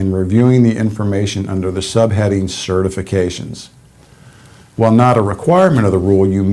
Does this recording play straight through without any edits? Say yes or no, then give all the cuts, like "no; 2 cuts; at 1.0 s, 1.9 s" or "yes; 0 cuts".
yes; 0 cuts